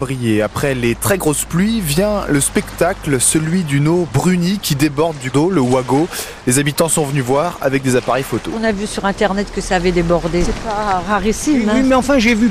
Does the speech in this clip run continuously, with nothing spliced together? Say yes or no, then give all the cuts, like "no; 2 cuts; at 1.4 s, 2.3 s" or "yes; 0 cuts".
no; 1 cut; at 5.3 s